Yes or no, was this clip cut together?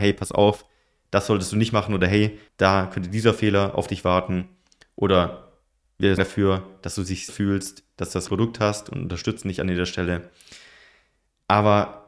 yes